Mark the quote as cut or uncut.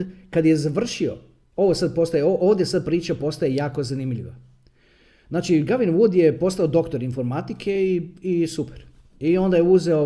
uncut